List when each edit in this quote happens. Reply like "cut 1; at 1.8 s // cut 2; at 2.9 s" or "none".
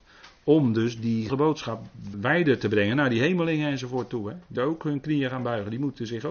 cut 1; at 1.3 s // cut 2; at 2.1 s // cut 3; at 4.6 s